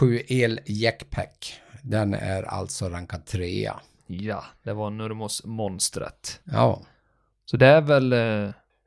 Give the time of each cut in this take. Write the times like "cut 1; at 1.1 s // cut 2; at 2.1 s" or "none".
none